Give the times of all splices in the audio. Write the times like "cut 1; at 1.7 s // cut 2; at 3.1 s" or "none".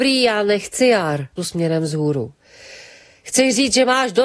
cut 1; at 1.4 s